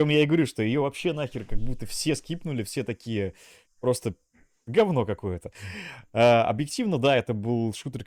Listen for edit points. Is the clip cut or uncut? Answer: uncut